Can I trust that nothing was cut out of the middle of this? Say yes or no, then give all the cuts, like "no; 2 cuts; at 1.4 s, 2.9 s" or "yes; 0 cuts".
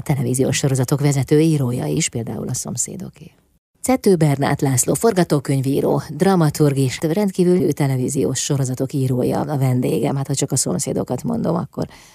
no; 2 cuts; at 7.0 s, 7.6 s